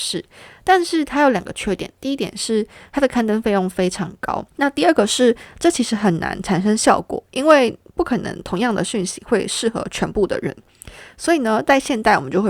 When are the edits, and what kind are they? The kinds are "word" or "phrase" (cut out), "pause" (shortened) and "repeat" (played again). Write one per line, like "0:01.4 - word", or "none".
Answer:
0:04.5 - pause